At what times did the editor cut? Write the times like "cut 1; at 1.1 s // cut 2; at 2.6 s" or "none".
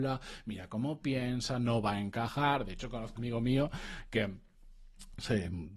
cut 1; at 3.2 s